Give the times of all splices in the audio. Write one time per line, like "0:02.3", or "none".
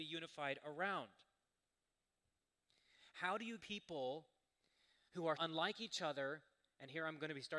0:03.6
0:05.4